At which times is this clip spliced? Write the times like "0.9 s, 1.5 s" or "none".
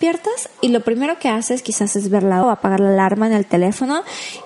2.4 s